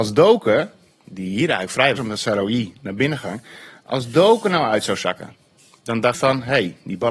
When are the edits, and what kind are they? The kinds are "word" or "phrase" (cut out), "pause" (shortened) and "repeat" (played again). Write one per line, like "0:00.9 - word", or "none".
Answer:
0:02.0 - word
0:05.6 - pause
0:06.1 - word